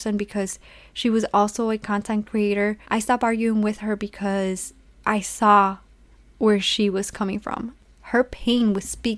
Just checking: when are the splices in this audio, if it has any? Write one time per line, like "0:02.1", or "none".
0:02.8
0:06.2